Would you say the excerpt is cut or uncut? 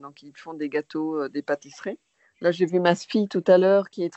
uncut